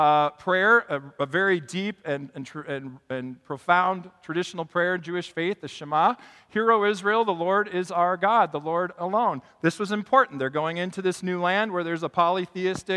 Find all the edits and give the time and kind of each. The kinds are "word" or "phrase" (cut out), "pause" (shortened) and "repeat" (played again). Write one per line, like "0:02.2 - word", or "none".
none